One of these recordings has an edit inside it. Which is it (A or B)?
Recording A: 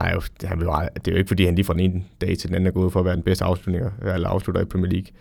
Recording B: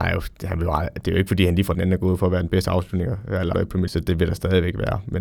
B